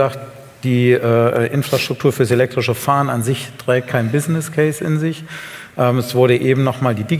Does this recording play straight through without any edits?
yes; 0 cuts

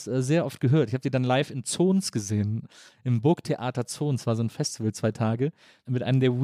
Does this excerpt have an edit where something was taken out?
no; 0 cuts

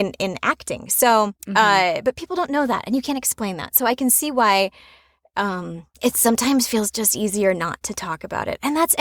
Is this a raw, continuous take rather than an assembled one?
no; 2 cuts; at 1.4 s, 5.9 s

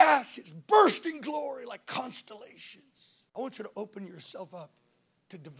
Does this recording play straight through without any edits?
no; 1 cut; at 3.3 s

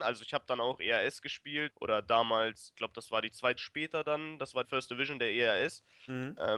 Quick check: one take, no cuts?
no; 4 cuts; at 1.7 s, 2.7 s, 3.6 s, 4.6 s

